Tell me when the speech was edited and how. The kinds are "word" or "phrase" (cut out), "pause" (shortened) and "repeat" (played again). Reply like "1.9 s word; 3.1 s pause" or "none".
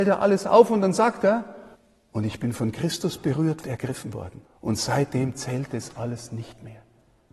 1.8 s pause; 3.6 s phrase; 4.5 s pause